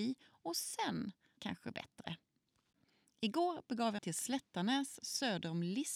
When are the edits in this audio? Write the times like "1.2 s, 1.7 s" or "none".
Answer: 1.4 s, 1.7 s, 4.0 s